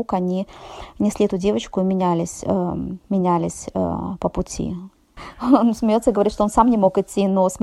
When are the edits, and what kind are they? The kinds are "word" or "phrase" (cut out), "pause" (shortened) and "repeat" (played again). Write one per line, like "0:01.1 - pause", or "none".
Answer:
0:03.0 - pause